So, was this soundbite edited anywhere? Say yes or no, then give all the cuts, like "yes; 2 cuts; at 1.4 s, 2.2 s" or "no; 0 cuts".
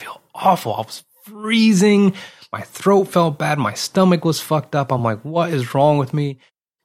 no; 0 cuts